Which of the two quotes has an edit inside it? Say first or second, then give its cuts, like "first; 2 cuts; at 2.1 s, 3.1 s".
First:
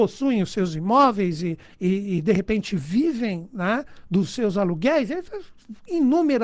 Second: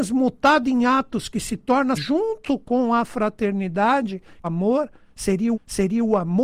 second; 3 cuts; at 1.9 s, 4.4 s, 5.5 s